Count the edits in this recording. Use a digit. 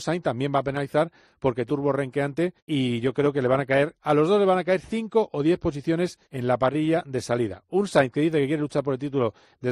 3